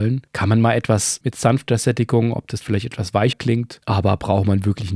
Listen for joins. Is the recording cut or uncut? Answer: cut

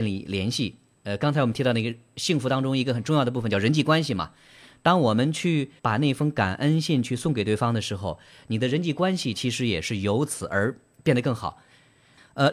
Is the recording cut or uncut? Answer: cut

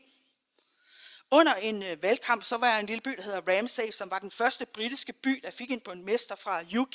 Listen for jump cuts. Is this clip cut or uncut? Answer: uncut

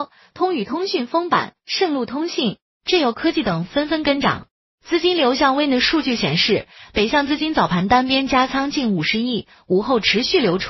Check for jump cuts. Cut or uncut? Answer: uncut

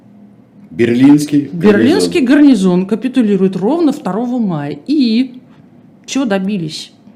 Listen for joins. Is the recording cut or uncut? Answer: uncut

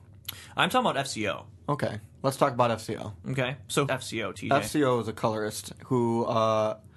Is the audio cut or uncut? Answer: cut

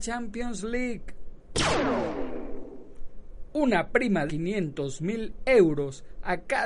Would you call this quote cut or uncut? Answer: cut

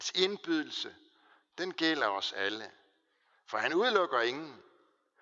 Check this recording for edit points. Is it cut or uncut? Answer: uncut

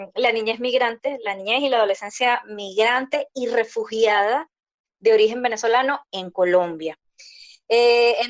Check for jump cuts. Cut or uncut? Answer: uncut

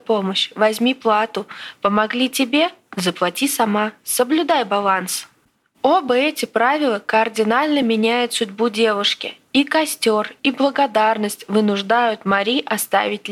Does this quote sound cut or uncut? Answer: uncut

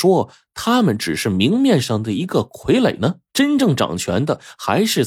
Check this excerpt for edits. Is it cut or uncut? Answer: cut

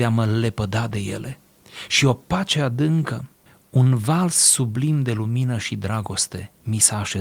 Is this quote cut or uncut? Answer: uncut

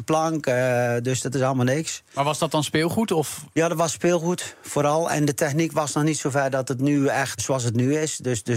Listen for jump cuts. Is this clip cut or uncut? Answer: cut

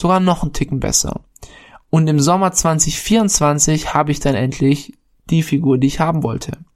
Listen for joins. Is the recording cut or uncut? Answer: uncut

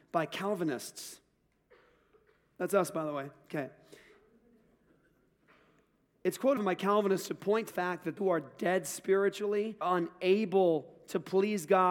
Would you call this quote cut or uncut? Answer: cut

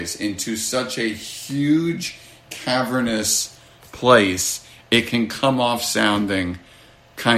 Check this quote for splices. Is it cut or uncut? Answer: uncut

